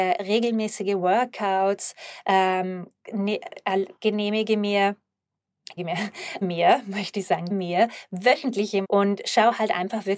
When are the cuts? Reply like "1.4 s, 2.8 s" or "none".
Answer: 3.0 s, 4.0 s, 5.8 s, 6.4 s, 7.5 s, 8.8 s

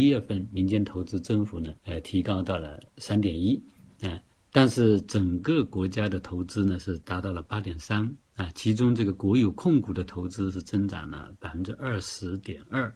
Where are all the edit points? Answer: 1.8 s, 4.3 s, 8.2 s

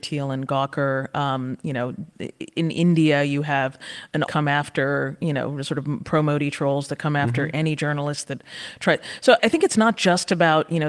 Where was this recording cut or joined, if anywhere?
4.3 s, 9.4 s

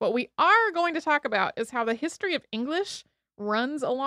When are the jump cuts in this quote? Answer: none

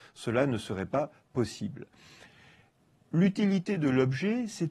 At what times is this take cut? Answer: none

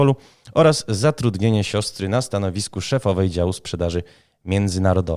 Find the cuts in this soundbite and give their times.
none

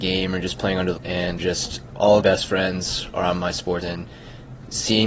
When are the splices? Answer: 1.0 s, 1.4 s, 2.2 s, 3.8 s

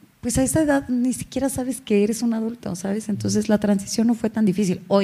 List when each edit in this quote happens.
none

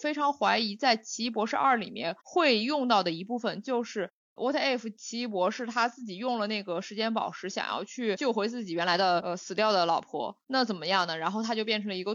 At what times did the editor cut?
2.2 s, 10.4 s

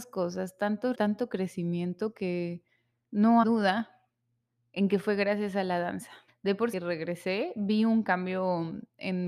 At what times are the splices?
0.9 s, 3.4 s, 6.3 s, 6.7 s

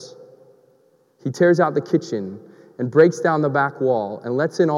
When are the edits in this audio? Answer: none

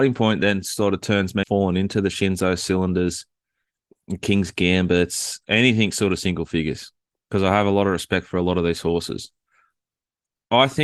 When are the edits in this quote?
1.4 s

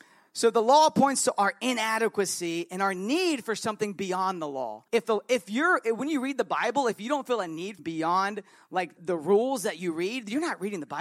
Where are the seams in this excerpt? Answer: 4.9 s, 7.8 s, 9.0 s

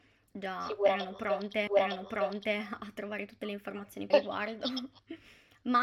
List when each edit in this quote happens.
1.7 s, 4.1 s

